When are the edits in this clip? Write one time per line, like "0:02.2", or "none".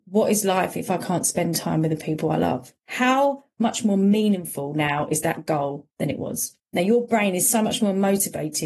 0:02.8
0:05.9
0:06.6